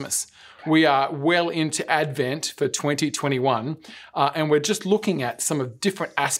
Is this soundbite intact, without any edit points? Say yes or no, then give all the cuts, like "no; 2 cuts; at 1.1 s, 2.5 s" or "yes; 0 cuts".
yes; 0 cuts